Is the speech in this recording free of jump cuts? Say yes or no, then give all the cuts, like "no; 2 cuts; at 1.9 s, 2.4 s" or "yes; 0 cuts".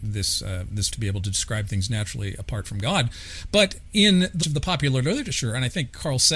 no; 2 cuts; at 0.9 s, 4.4 s